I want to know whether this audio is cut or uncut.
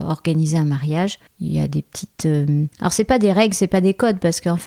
cut